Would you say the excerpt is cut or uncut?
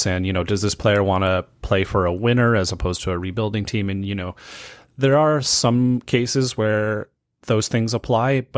uncut